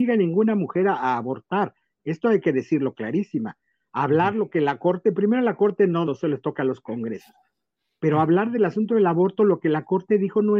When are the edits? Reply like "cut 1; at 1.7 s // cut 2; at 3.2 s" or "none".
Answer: cut 1; at 6.1 s